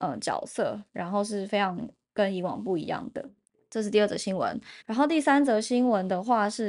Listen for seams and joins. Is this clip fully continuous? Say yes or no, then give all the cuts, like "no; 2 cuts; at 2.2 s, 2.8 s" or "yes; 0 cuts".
no; 2 cuts; at 3.4 s, 4.8 s